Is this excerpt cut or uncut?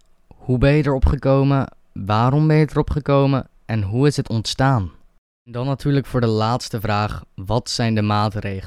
cut